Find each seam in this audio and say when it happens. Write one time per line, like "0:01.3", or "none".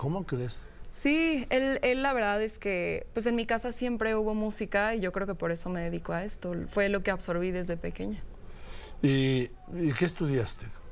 none

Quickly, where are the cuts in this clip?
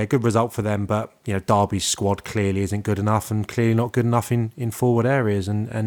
none

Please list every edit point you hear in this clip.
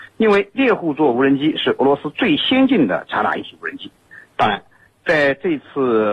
none

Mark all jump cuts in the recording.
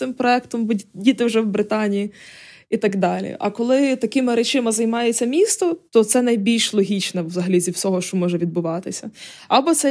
none

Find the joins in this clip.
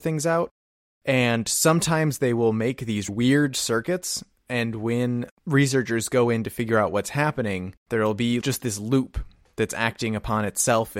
0:03.1
0:05.4
0:08.4

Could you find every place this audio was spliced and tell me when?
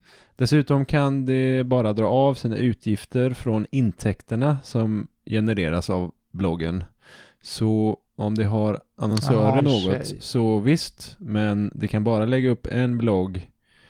0:08.1
0:09.6

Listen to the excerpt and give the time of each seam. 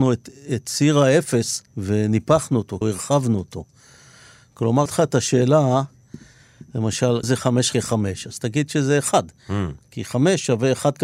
0:01.7
0:02.8
0:04.9
0:07.2
0:07.7

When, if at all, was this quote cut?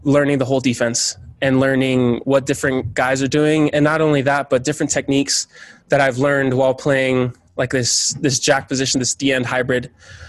none

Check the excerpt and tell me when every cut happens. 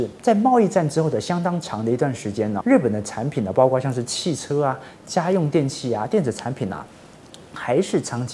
0:02.6

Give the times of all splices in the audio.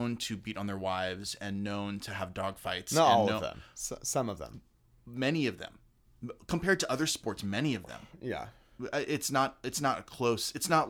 none

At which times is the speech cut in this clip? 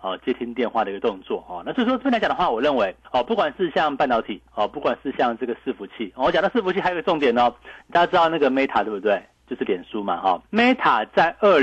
0:03.0
0:04.5
0:10.5

